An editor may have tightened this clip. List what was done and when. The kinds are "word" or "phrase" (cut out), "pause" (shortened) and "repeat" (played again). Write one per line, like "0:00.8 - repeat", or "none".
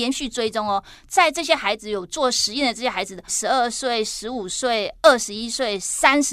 0:03.3 - phrase